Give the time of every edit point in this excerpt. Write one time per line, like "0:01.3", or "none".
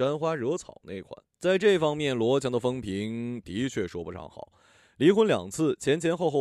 0:01.3